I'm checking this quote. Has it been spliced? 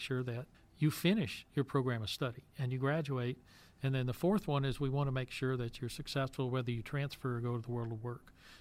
no; 0 cuts

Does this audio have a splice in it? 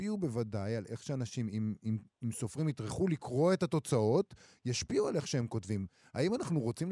no; 0 cuts

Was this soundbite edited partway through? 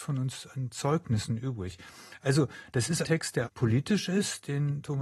yes; 2 cuts; at 3.0 s, 3.5 s

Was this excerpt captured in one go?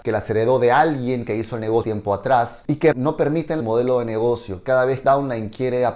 no; 4 cuts; at 1.8 s, 2.9 s, 3.6 s, 5.0 s

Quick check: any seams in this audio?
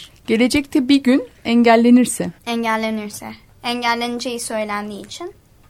yes; 1 cut; at 2.4 s

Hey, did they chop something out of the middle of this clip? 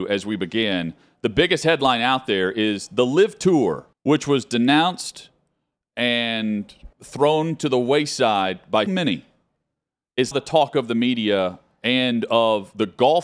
yes; 4 cuts; at 3.9 s, 6.9 s, 8.9 s, 10.3 s

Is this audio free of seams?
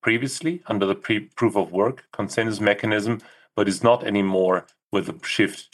yes; 0 cuts

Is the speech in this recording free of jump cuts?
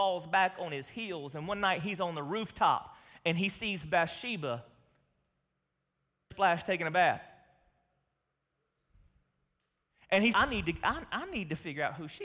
no; 2 cuts; at 6.3 s, 10.3 s

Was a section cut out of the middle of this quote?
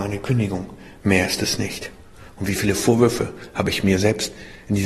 no; 0 cuts

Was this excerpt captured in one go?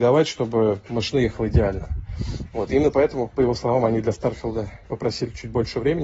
yes; 0 cuts

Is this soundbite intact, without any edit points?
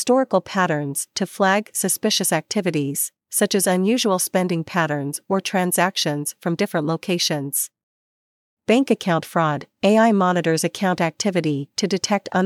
yes; 0 cuts

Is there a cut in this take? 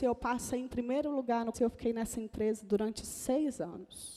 yes; 1 cut; at 1.5 s

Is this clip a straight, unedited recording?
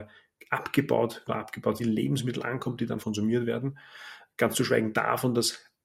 no; 3 cuts; at 1.3 s, 1.8 s, 3.0 s

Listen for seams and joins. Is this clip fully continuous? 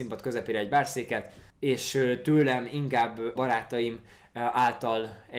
no; 2 cuts; at 1.5 s, 3.4 s

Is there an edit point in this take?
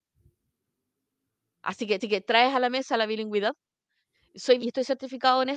yes; 2 cuts; at 2.0 s, 4.6 s

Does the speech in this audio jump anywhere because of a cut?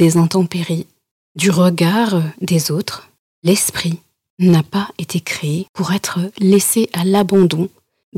no; 0 cuts

